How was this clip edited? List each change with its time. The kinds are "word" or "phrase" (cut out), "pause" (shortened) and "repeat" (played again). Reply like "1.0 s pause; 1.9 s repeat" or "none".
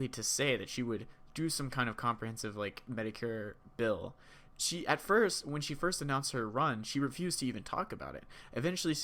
none